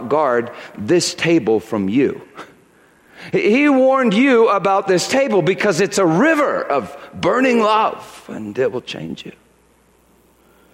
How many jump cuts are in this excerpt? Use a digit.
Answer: 0